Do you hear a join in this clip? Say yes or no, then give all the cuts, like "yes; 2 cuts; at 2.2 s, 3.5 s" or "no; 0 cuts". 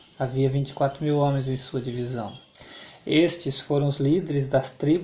no; 0 cuts